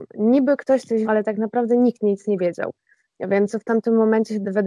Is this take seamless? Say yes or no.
no